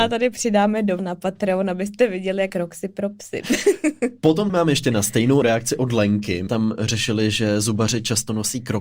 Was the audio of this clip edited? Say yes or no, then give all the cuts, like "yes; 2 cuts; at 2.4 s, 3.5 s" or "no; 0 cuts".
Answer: yes; 5 cuts; at 1.0 s, 2.5 s, 4.5 s, 5.4 s, 6.5 s